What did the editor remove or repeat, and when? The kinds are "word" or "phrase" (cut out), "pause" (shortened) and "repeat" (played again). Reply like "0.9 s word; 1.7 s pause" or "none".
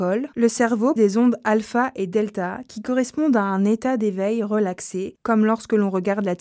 1.0 s word